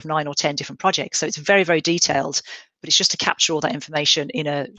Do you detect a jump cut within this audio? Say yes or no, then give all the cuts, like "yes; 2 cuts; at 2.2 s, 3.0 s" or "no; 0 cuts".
no; 0 cuts